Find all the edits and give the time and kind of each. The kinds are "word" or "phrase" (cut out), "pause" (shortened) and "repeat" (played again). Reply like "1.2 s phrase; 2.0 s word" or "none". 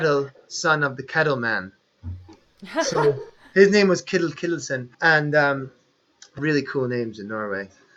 4.9 s pause; 6.4 s word